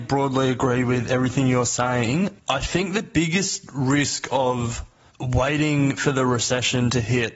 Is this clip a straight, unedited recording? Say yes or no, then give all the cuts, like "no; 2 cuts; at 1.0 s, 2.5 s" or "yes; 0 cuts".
yes; 0 cuts